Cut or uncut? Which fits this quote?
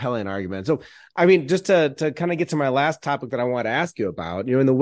uncut